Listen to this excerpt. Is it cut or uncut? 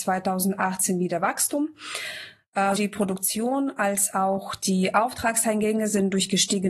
cut